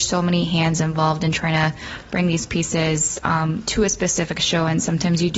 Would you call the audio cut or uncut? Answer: uncut